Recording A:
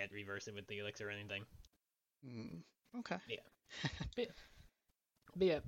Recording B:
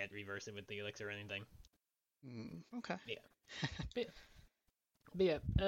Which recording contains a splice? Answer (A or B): B